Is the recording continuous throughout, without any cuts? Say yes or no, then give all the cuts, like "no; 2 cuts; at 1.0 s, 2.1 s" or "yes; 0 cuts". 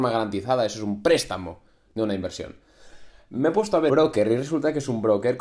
no; 1 cut; at 3.9 s